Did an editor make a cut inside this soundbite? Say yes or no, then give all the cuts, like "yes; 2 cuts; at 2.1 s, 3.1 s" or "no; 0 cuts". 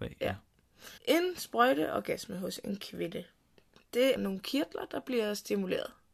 yes; 2 cuts; at 1.0 s, 4.2 s